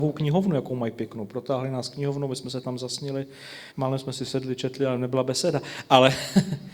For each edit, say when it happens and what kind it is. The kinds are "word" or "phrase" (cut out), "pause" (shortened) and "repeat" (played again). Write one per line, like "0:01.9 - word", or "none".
0:03.7 - pause

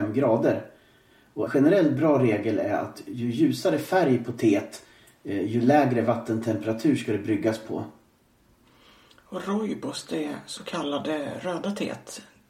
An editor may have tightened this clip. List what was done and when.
0:01.5 - word

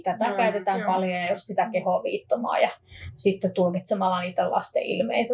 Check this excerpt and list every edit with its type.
none

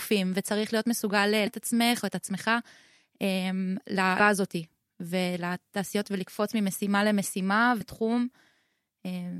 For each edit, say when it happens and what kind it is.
0:01.5 - word
0:04.2 - word
0:06.0 - word
0:07.8 - word

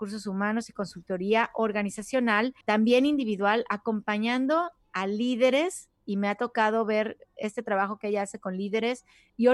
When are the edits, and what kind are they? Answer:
0:02.6 - pause

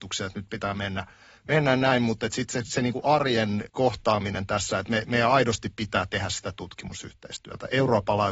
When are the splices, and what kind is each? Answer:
none

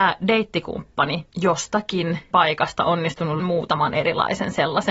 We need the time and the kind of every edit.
0:01.3 - word
0:02.3 - word
0:03.4 - word

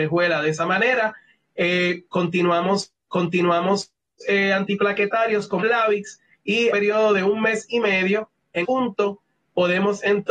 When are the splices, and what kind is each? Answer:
0:03.1 - repeat
0:05.6 - word
0:06.7 - phrase
0:08.6 - word

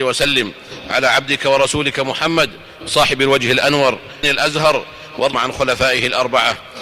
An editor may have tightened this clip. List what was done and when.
0:04.2 - word
0:05.3 - word

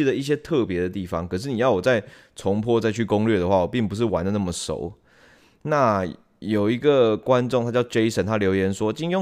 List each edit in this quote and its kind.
none

